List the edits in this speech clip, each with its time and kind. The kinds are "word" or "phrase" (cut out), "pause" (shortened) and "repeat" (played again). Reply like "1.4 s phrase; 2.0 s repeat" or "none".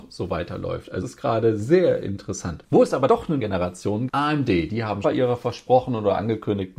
1.0 s word; 3.1 s word; 3.4 s word; 4.1 s word; 5.0 s phrase

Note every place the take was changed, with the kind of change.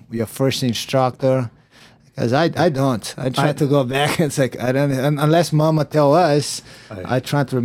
none

